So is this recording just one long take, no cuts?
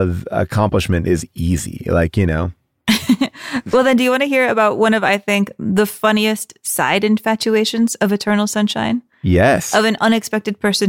yes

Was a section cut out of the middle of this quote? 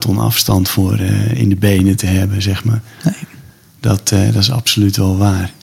no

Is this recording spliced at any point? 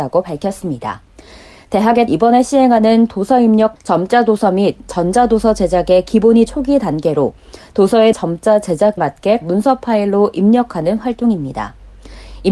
yes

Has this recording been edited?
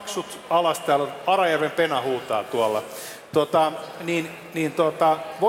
no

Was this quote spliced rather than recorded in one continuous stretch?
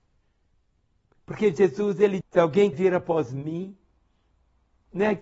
yes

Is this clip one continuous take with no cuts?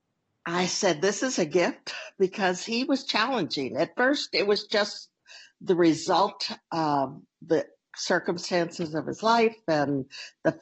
yes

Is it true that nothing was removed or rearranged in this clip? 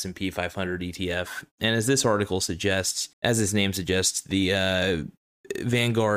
no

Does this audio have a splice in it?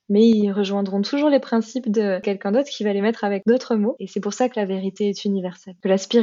no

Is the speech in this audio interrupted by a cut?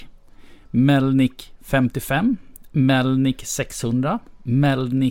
no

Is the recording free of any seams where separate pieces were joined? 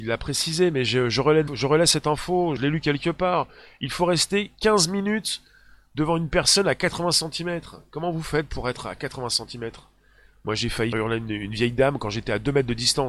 no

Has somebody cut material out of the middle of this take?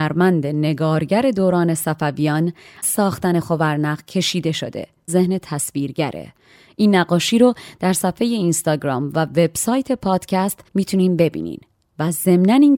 yes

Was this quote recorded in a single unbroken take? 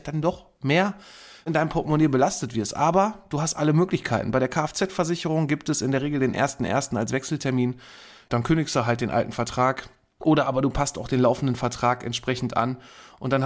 yes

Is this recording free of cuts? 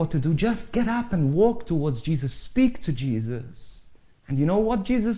no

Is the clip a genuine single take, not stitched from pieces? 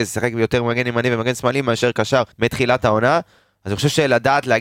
no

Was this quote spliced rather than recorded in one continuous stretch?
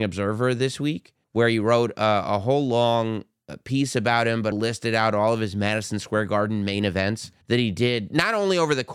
yes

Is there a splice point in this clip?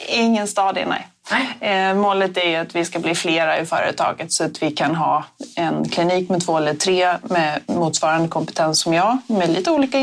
no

